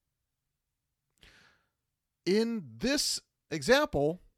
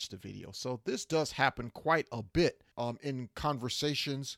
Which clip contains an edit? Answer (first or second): second